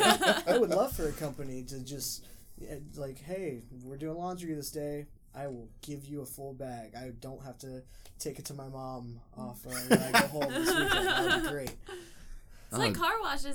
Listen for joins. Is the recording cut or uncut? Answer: uncut